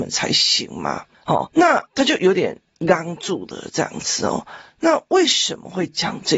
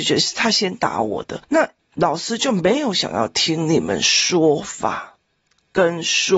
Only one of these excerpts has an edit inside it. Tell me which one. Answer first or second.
first